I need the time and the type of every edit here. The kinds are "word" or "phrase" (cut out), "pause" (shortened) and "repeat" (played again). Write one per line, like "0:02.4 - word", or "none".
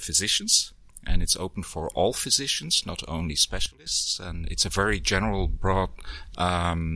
0:04.4 - word